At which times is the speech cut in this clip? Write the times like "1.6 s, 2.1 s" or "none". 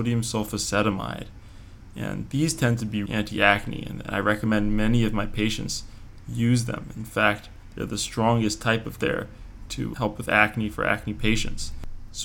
3.1 s, 9.0 s, 9.9 s

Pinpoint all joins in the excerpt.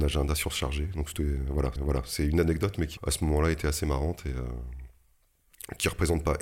1.8 s, 3.0 s

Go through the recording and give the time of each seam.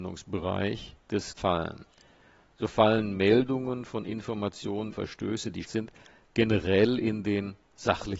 1.4 s, 4.9 s, 5.6 s

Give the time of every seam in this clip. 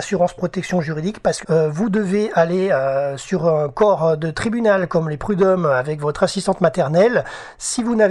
1.4 s

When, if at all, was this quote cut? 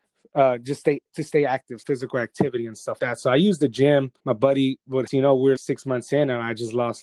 1.8 s, 3.0 s, 4.2 s, 5.1 s, 5.6 s

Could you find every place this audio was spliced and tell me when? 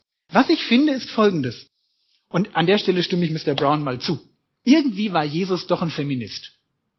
none

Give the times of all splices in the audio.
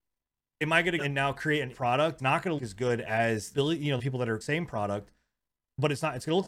1.0 s, 1.7 s, 2.2 s, 2.6 s, 3.5 s, 4.0 s, 4.4 s

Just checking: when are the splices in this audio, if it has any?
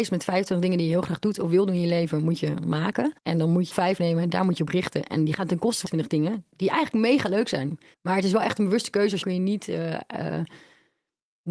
3.2 s, 3.7 s, 5.9 s, 7.9 s, 9.2 s

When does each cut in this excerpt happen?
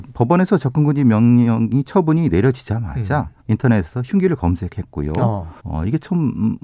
3.4 s, 5.6 s

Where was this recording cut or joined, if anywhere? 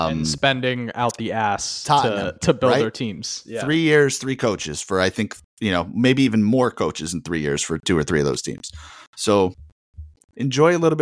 none

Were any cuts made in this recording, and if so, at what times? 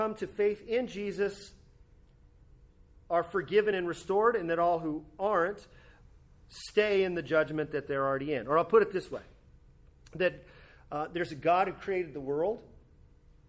none

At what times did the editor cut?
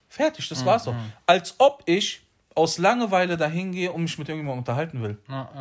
none

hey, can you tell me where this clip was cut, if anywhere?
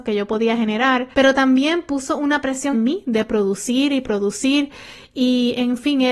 1.1 s, 2.7 s

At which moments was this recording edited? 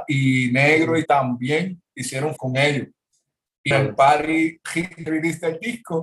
1.1 s, 2.4 s, 3.7 s, 5.1 s

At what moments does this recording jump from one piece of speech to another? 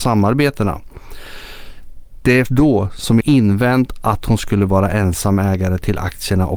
2.5 s, 3.2 s

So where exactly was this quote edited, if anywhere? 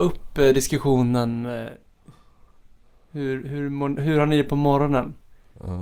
4.0 s

